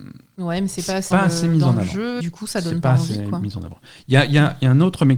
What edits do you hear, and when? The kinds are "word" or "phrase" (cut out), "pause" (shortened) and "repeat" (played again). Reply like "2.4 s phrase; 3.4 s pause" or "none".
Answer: 1.1 s phrase; 2.2 s word